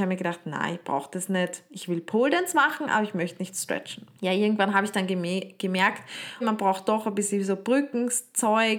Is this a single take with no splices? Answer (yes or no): no